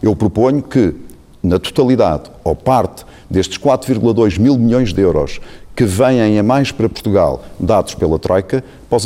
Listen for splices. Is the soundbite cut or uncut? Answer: uncut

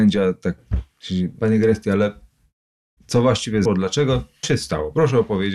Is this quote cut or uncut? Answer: cut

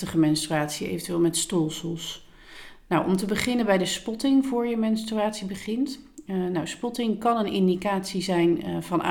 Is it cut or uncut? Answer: uncut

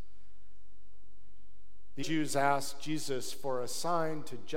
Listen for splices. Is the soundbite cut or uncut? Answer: cut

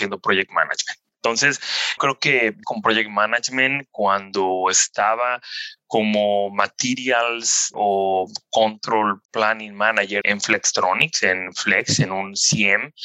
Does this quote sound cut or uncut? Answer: cut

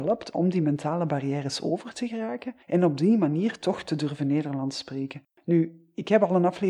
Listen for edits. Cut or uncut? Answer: cut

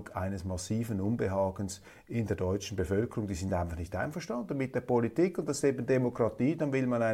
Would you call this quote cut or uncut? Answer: uncut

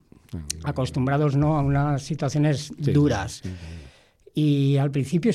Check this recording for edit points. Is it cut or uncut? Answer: uncut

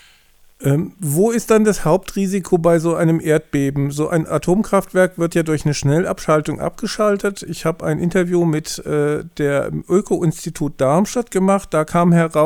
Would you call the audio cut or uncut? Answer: uncut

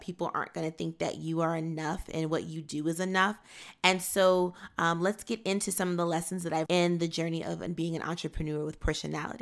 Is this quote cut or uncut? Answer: cut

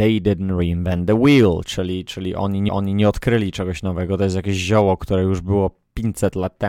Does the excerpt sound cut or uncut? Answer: cut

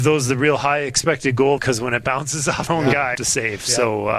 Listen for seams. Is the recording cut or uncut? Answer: cut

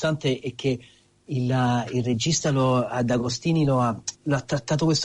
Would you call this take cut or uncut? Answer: cut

